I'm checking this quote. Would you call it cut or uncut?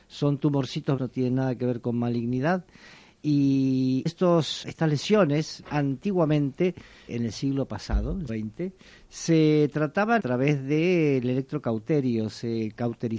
cut